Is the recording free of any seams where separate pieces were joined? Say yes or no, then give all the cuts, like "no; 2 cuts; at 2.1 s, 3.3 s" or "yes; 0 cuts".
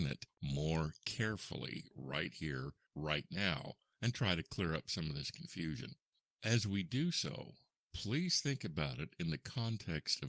yes; 0 cuts